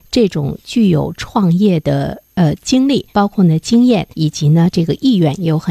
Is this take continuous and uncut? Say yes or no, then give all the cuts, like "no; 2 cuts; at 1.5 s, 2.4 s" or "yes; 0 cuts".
no; 2 cuts; at 3.1 s, 4.1 s